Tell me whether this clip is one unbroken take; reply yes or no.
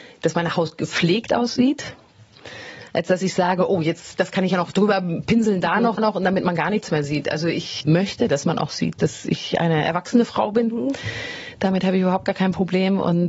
no